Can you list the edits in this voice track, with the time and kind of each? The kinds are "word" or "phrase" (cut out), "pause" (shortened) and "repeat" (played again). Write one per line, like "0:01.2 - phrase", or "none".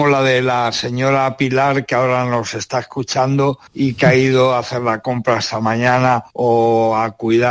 0:03.7 - pause
0:06.3 - pause